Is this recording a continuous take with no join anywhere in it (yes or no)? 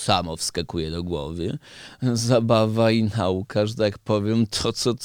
yes